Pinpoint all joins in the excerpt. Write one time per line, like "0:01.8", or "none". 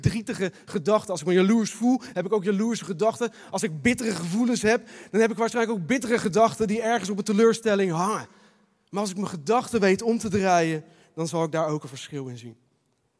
none